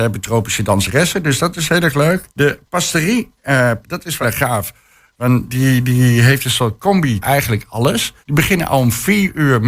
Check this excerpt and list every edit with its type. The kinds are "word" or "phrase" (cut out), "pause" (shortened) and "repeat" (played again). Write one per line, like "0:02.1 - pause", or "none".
0:02.3 - pause
0:03.8 - word
0:04.2 - word
0:05.5 - word
0:07.2 - word
0:08.2 - pause